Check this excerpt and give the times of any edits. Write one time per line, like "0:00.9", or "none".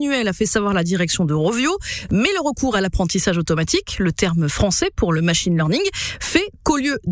none